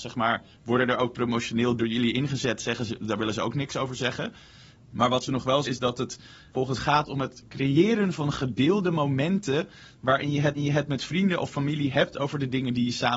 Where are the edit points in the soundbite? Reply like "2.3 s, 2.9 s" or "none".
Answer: 1.8 s, 5.6 s, 6.8 s, 10.6 s